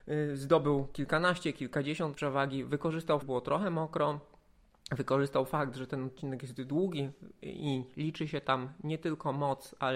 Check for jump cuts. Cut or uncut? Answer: cut